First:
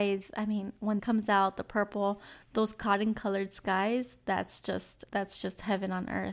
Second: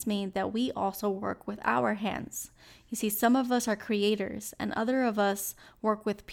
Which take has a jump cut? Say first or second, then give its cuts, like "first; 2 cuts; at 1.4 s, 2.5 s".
first; 2 cuts; at 1.0 s, 5.1 s